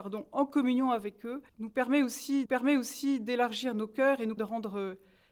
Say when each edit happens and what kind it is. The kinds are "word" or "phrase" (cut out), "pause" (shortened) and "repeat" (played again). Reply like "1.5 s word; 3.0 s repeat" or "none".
1.5 s pause; 2.4 s repeat; 4.4 s word